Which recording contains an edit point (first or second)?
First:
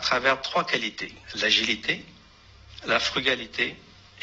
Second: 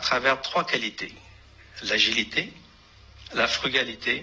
first